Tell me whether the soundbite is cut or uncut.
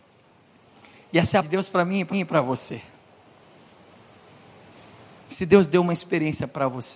cut